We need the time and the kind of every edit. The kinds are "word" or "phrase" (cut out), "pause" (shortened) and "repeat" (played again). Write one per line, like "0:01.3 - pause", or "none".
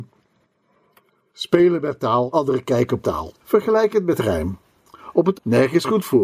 0:02.3 - phrase
0:03.0 - word
0:03.4 - pause
0:05.3 - word